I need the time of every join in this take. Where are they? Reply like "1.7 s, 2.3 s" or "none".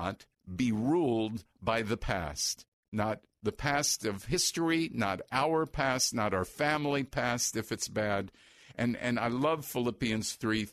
none